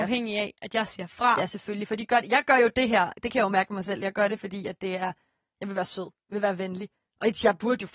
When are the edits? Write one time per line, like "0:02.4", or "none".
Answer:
none